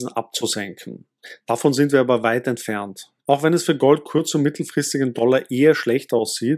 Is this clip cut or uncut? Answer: cut